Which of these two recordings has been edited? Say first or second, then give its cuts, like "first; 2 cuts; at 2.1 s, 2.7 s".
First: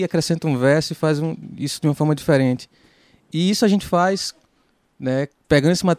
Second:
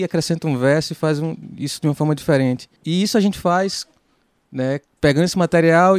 second; 1 cut; at 2.8 s